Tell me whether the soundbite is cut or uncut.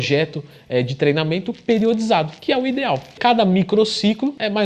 uncut